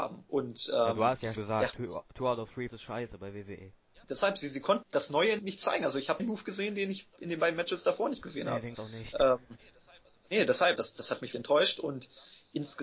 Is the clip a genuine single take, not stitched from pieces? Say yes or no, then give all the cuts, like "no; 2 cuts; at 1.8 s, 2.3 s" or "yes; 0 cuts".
no; 9 cuts; at 1.4 s, 2.7 s, 4.0 s, 4.8 s, 5.4 s, 6.2 s, 8.7 s, 10.8 s, 11.3 s